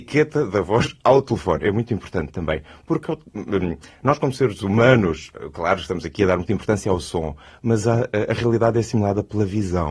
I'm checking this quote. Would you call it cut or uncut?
uncut